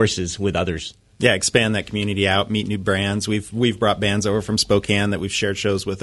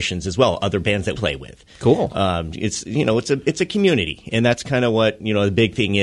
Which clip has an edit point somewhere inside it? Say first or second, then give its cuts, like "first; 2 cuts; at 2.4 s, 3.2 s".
second; 1 cut; at 1.1 s